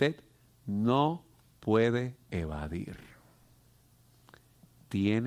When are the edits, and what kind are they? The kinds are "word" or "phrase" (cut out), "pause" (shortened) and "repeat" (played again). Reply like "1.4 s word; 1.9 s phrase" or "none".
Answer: none